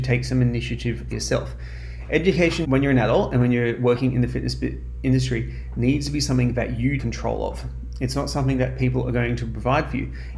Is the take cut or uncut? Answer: cut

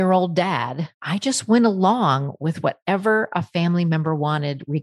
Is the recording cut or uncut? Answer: cut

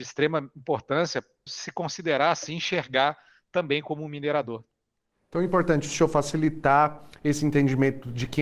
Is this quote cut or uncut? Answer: cut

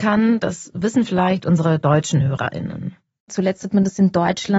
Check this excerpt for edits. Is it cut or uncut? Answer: uncut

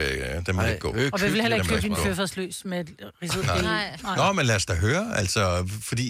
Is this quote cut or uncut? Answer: uncut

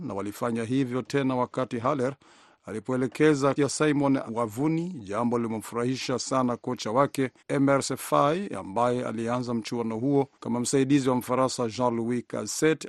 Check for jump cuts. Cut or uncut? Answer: cut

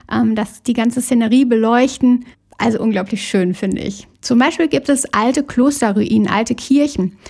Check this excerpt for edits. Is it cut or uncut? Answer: cut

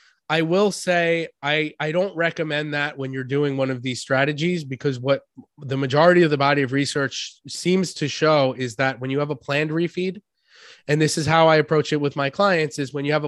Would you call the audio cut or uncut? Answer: uncut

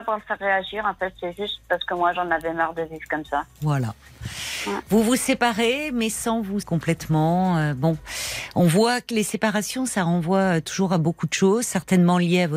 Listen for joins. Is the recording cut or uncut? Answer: cut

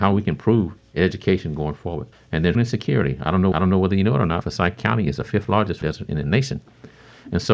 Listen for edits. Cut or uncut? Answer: cut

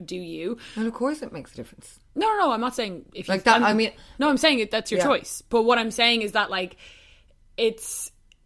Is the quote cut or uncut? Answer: uncut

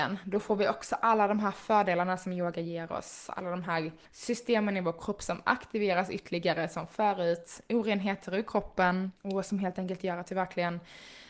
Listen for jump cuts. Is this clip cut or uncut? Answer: cut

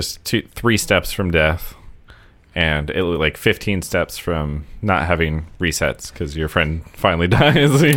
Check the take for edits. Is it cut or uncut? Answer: uncut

